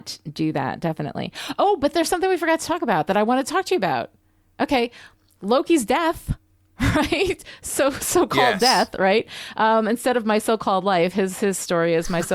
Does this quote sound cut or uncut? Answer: uncut